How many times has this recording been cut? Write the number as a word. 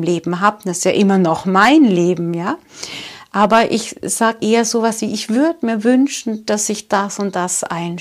two